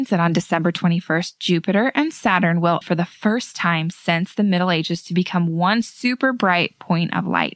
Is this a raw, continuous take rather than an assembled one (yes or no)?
no